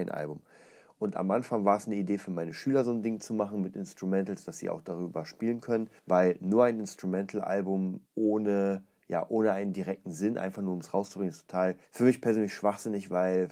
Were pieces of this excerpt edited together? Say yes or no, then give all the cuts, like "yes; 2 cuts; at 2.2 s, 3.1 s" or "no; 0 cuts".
yes; 3 cuts; at 6.0 s, 8.1 s, 11.8 s